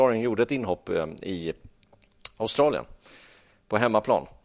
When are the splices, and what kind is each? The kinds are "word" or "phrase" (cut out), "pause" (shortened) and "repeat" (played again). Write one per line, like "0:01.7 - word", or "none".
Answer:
none